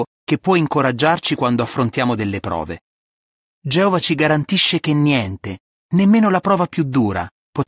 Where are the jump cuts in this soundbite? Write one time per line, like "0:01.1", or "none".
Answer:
none